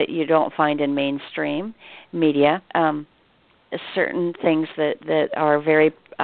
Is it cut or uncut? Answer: cut